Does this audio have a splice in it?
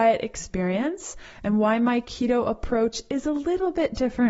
no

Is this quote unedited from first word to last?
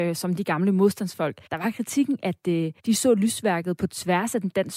no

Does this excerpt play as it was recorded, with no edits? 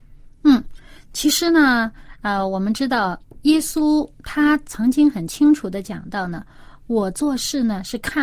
yes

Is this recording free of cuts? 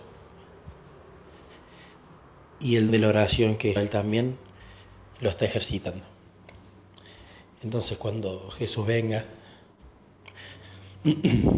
no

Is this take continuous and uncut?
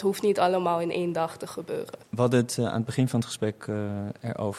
yes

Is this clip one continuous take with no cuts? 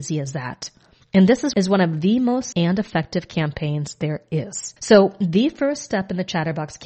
no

